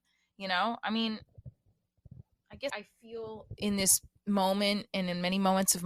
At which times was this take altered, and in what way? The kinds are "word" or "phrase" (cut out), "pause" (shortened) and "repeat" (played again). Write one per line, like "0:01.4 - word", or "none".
0:02.7 - word